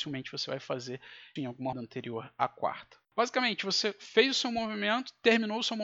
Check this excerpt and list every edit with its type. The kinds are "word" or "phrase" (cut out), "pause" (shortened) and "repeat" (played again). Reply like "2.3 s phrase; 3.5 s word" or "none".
1.4 s word; 1.7 s word; 3.0 s pause